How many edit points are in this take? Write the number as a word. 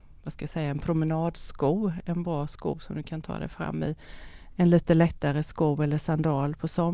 zero